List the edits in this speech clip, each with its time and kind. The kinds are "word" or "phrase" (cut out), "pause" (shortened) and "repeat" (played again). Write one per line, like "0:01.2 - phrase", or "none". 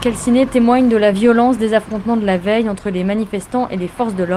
none